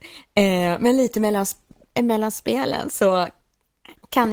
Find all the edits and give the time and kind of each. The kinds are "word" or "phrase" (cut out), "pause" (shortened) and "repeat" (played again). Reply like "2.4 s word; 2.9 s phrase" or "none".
none